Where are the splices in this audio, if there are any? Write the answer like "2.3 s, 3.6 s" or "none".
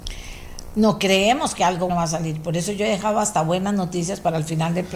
1.9 s

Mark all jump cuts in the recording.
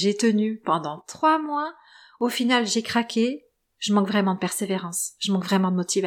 none

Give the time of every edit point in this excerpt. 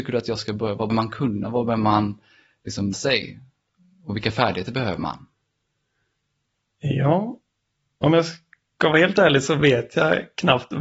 0.9 s, 2.9 s

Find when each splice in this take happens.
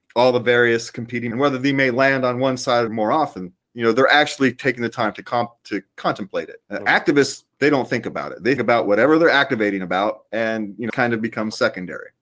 1.3 s, 2.9 s, 3.6 s, 6.6 s, 7.5 s, 8.6 s, 10.9 s

